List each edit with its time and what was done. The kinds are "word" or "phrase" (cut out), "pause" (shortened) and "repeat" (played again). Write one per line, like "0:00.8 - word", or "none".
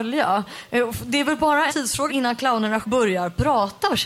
0:01.7 - word
0:02.1 - word
0:02.8 - word